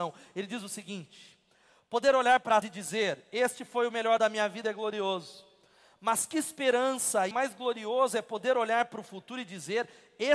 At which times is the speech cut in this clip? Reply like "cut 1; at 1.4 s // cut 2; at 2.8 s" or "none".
cut 1; at 2.6 s // cut 2; at 4.2 s // cut 3; at 7.3 s